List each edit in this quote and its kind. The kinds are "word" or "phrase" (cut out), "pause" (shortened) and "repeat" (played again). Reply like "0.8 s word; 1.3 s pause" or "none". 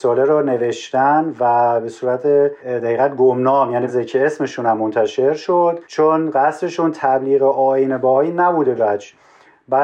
2.6 s pause; 3.9 s word; 5.8 s pause; 8.8 s phrase